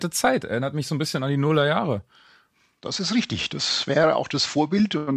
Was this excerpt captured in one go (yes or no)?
yes